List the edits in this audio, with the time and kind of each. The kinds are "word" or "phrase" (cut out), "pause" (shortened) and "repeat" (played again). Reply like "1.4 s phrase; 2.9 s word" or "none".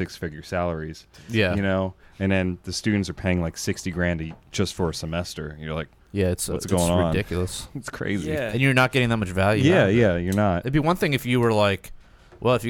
6.0 s pause